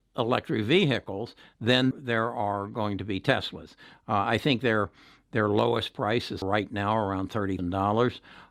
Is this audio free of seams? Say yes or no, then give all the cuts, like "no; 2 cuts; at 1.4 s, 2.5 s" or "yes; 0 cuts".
no; 3 cuts; at 1.9 s, 6.4 s, 7.6 s